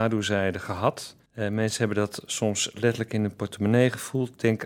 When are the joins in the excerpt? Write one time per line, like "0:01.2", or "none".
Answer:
0:01.3